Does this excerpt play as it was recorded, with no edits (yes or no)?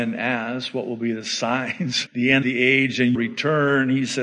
no